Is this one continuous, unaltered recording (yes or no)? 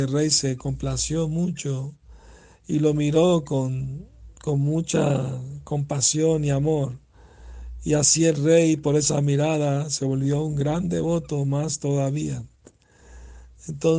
yes